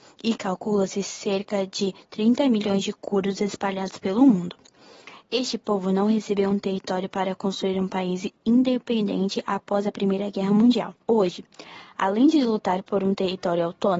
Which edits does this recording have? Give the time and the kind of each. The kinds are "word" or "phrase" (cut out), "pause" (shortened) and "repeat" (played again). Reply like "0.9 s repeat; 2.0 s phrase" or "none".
11.0 s pause

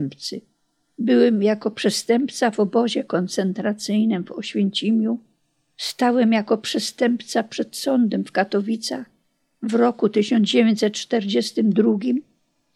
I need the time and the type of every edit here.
none

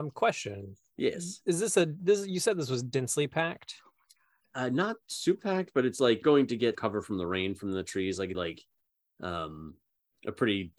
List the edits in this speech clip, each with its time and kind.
5.4 s word; 6.2 s word; 6.7 s word; 8.3 s word

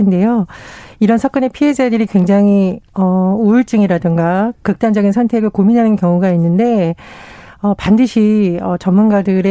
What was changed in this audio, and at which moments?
none

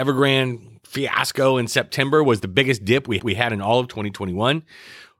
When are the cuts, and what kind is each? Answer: 3.2 s repeat

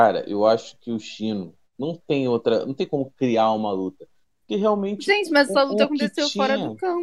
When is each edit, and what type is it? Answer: none

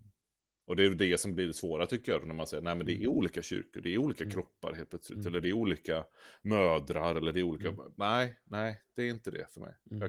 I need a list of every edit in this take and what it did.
none

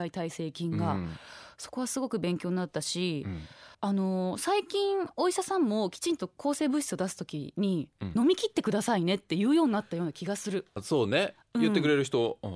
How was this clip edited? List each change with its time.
3.7 s pause; 10.8 s phrase

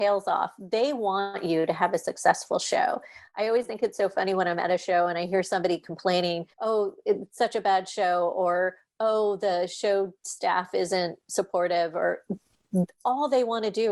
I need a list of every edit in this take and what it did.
6.5 s pause

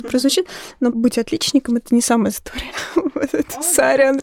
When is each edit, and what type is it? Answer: 0.9 s word; 2.3 s word

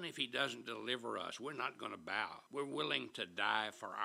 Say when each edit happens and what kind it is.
2.5 s pause

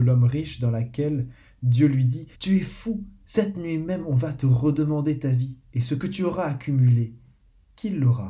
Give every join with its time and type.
2.3 s pause; 5.6 s pause

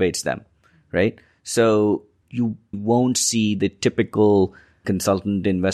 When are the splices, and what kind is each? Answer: 2.2 s word; 2.7 s word; 4.8 s word

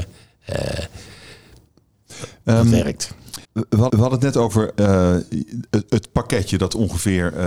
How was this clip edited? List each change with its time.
3.4 s pause; 3.9 s repeat

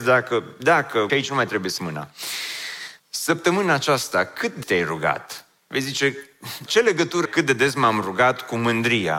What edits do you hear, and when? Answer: 1.1 s phrase; 1.8 s word; 3.0 s pause; 4.6 s word; 6.7 s word; 7.3 s word

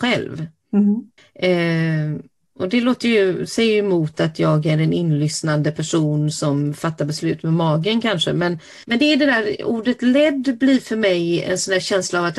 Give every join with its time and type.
1.2 s pause; 8.8 s pause

